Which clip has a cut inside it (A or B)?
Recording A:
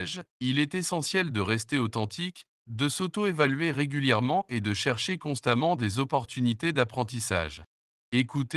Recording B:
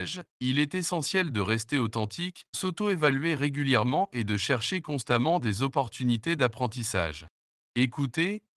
B